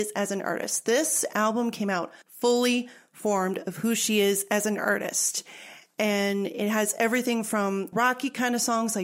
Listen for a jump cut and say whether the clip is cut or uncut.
cut